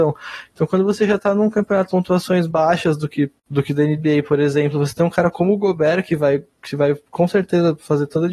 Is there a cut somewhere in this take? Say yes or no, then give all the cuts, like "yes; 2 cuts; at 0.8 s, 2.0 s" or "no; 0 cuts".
yes; 3 cuts; at 1.9 s, 2.5 s, 3.4 s